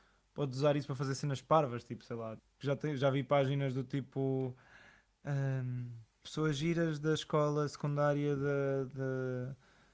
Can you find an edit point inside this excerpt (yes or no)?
no